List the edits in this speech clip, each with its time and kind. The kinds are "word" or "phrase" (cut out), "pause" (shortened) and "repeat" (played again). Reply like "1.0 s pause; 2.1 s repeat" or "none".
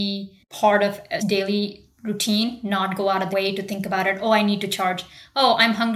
1.2 s word; 3.3 s word